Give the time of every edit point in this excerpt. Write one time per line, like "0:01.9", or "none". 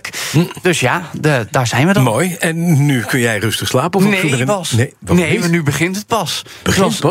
none